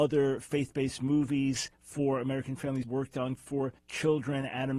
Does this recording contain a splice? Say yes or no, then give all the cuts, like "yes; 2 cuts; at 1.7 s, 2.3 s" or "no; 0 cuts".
yes; 4 cuts; at 1.7 s, 2.8 s, 3.4 s, 3.8 s